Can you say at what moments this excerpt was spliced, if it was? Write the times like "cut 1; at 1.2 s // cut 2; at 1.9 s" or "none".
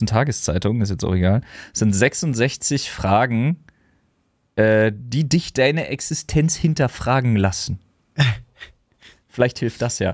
none